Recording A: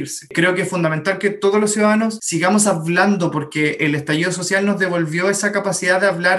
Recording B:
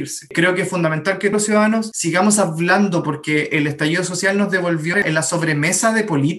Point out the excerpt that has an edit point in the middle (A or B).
B